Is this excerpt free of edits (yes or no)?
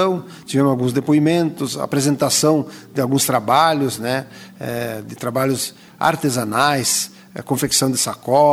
yes